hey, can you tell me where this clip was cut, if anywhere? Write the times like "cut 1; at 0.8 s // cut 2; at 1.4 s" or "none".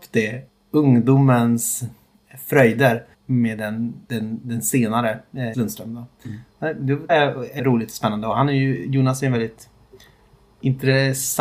cut 1; at 3.1 s // cut 2; at 4.0 s // cut 3; at 5.5 s // cut 4; at 7.1 s // cut 5; at 7.6 s